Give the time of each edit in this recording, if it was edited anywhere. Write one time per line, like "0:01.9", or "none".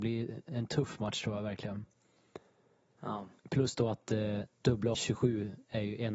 0:03.4
0:04.9